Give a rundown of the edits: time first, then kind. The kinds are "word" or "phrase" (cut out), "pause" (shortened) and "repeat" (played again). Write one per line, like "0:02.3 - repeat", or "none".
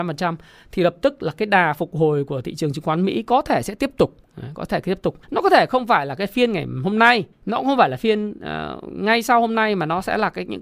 0:05.2 - pause
0:07.3 - pause